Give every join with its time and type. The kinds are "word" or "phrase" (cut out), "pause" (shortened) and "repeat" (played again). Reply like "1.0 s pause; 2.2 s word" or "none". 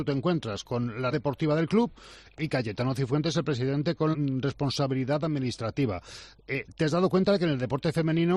1.1 s word; 4.1 s word